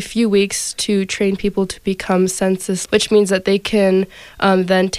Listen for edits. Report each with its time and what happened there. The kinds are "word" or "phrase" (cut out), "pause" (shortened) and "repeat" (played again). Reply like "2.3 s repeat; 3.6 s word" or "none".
2.9 s word